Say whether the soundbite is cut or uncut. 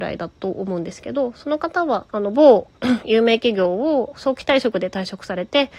cut